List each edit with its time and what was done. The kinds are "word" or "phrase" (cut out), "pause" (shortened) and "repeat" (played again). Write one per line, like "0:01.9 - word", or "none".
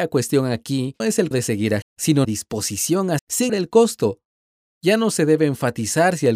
0:01.0 - word
0:01.3 - word
0:01.8 - word
0:02.2 - word
0:03.2 - word
0:03.5 - word